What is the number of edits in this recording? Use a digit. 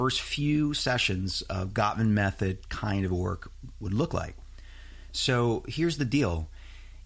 0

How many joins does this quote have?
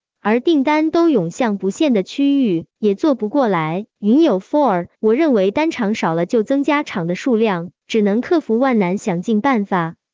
4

